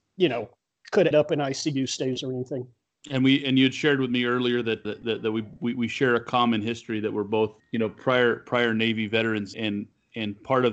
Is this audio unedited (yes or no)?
no